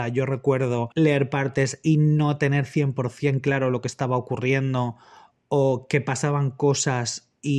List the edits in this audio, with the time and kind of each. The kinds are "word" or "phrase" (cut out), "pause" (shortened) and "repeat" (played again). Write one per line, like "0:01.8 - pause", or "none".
none